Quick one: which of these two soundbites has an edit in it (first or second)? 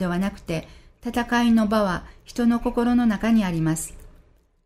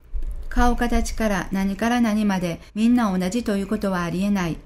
second